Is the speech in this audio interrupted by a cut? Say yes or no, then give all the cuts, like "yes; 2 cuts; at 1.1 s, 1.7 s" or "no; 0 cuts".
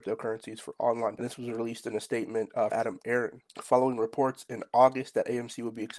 yes; 3 cuts; at 1.2 s, 2.7 s, 3.5 s